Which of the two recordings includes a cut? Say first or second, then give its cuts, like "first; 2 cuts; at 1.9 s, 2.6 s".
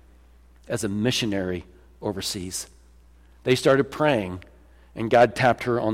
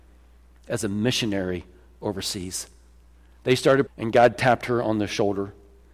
second; 1 cut; at 3.9 s